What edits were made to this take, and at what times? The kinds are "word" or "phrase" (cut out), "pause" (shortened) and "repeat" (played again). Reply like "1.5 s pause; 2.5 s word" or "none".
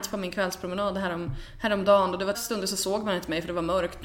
2.3 s phrase

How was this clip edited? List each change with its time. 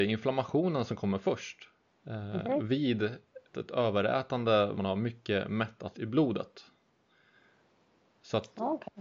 1.8 s pause; 3.5 s word; 4.7 s word; 5.9 s word

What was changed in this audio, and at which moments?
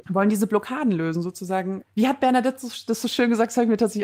none

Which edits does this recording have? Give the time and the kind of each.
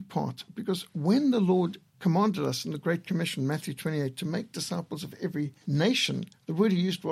1.9 s pause; 5.6 s pause

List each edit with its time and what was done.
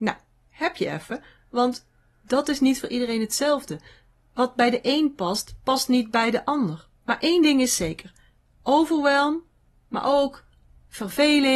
7.0 s pause

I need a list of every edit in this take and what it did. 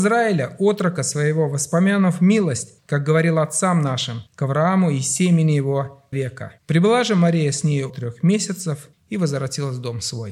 2.8 s pause; 4.3 s pause; 6.1 s word; 6.6 s pause; 7.9 s word; 8.9 s pause

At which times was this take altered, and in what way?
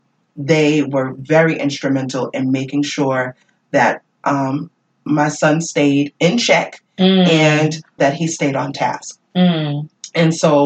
8.0 s word

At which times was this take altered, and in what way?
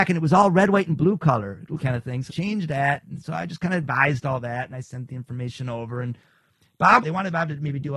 1.8 s phrase; 2.3 s word; 4.7 s word; 7.0 s phrase

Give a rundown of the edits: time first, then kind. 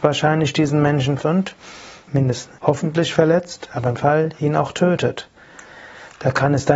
1.2 s word; 2.1 s word; 2.6 s word; 4.0 s word

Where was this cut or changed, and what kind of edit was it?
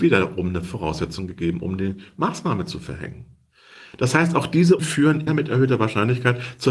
4.8 s word; 5.3 s word

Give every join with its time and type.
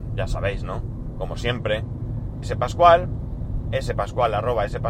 2.4 s word

